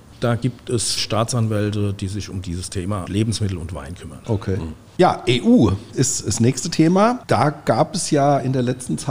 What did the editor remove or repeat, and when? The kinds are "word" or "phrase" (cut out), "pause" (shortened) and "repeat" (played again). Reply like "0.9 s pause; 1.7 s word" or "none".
1.0 s word; 3.1 s word; 5.9 s word

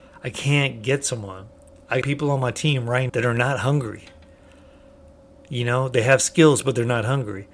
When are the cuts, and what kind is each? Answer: 2.0 s word; 3.1 s word

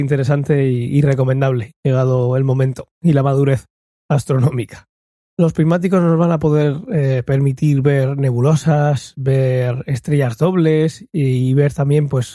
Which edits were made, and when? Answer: none

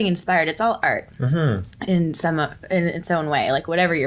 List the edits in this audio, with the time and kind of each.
none

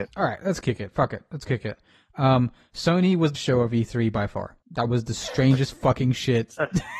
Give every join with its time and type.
3.4 s word; 4.6 s pause

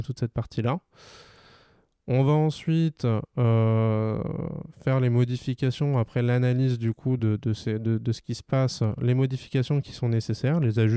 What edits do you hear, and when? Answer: none

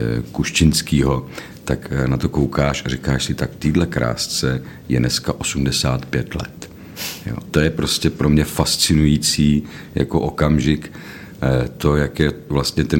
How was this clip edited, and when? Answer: 7.5 s word

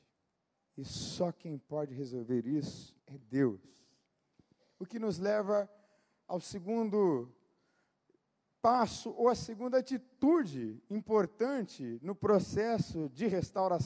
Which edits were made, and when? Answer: 3.0 s pause

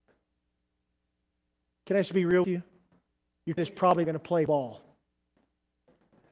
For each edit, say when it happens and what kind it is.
2.4 s word; 3.6 s word; 4.0 s word; 4.5 s word

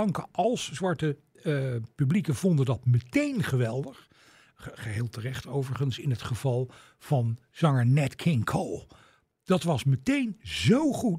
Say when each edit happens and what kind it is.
none

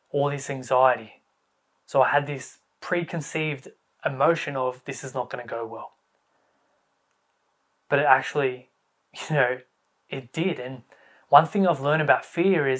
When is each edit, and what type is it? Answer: none

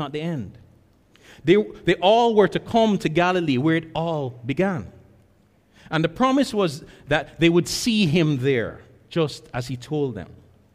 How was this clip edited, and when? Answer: none

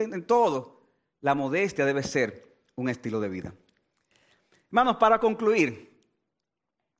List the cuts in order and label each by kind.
none

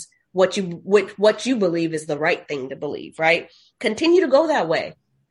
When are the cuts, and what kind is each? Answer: none

